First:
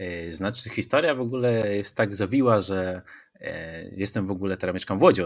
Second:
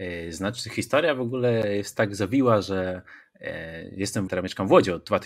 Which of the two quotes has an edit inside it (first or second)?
second